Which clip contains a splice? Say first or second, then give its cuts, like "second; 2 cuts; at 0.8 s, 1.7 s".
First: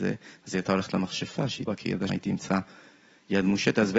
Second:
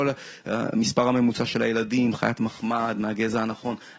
first; 2 cuts; at 1.7 s, 2.1 s